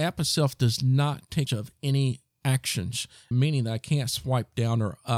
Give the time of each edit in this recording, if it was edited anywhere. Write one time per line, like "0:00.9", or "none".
0:01.5
0:03.3